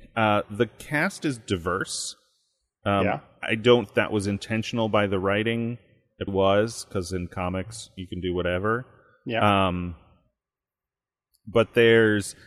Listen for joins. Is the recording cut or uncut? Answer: cut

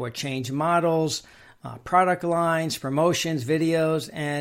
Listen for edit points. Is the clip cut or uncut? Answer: uncut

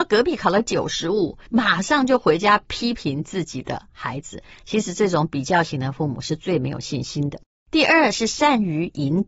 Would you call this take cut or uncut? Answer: cut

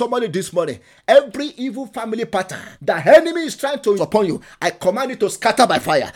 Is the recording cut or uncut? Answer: cut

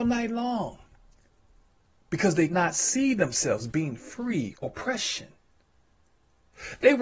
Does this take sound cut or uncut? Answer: cut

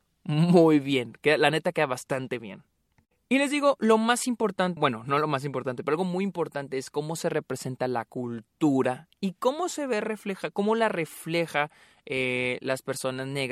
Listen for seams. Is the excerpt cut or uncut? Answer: cut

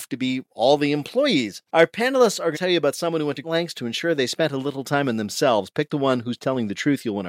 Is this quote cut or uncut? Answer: cut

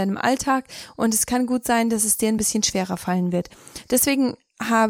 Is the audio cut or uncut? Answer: uncut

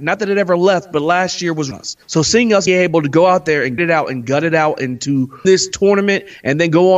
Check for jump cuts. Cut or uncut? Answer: cut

